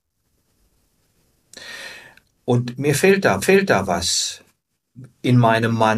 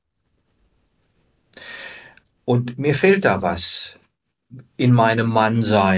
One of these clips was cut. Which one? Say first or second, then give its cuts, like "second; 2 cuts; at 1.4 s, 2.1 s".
first; 1 cut; at 3.4 s